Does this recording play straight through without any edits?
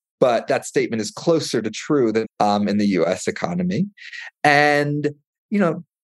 no; 1 cut; at 2.2 s

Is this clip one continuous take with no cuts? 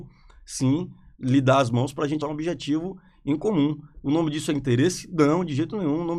no; 1 cut; at 2.2 s

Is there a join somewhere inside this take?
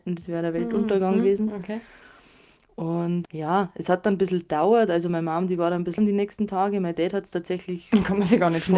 yes; 2 cuts; at 3.3 s, 6.0 s

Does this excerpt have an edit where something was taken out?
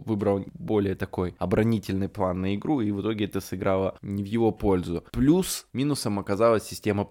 no; 0 cuts

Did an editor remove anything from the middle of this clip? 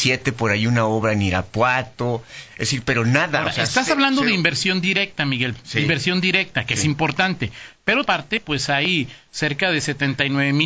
yes; 1 cut; at 8.1 s

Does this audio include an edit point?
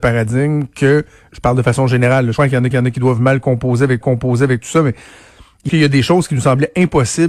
yes; 5 cuts; at 1.3 s, 2.4 s, 2.7 s, 4.0 s, 5.7 s

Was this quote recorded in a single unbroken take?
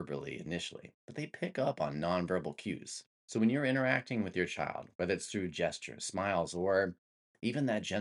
no; 2 cuts; at 1.0 s, 3.2 s

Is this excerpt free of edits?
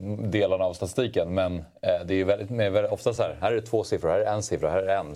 yes; 0 cuts

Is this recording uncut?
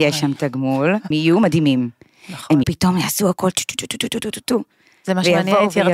no; 2 cuts; at 1.1 s, 2.6 s

